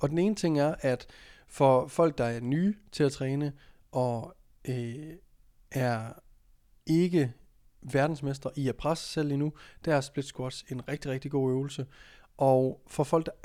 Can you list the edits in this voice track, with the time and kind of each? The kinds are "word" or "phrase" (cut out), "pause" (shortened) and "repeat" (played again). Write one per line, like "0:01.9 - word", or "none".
none